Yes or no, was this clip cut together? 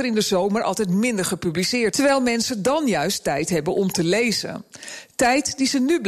yes